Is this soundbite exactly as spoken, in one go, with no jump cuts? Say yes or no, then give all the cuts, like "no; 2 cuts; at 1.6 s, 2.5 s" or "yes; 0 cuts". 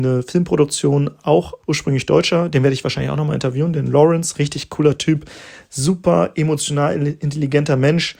no; 1 cut; at 1.6 s